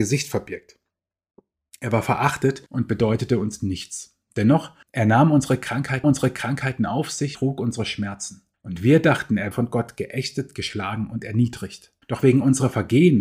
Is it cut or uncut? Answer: cut